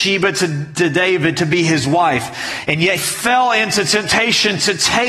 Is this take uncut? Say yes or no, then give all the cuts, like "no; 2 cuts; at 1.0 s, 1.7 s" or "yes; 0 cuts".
no; 1 cut; at 3.0 s